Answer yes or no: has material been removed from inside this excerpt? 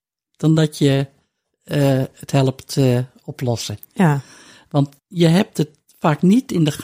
yes